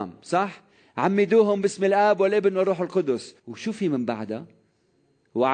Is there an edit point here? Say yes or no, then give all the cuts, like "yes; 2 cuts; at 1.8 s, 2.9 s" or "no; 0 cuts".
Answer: yes; 1 cut; at 3.4 s